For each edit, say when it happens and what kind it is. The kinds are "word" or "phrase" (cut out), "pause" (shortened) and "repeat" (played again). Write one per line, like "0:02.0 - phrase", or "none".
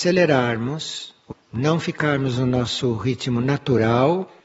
0:01.3 - phrase